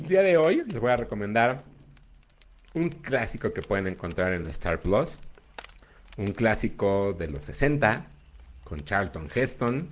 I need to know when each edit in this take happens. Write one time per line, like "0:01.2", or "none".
none